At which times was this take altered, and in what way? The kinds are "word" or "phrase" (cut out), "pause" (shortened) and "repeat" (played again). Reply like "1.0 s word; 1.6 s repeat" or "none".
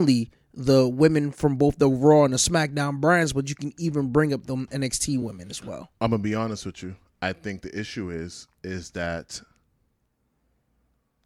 none